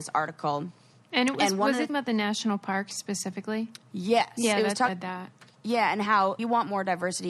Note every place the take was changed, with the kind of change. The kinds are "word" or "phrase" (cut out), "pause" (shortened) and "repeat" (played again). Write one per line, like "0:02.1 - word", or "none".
0:01.9 - phrase
0:04.9 - phrase
0:06.4 - phrase